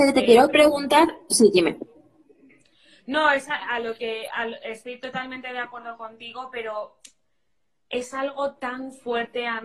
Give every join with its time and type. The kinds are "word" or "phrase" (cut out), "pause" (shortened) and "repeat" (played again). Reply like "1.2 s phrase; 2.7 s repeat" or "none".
none